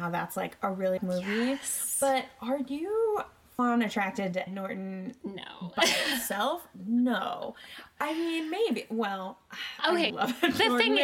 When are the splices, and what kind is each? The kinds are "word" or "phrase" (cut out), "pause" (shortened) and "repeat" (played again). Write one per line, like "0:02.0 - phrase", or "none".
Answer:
0:01.0 - word
0:03.6 - word
0:04.5 - word
0:10.1 - word